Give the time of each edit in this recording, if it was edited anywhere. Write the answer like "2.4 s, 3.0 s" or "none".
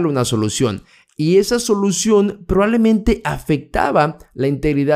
none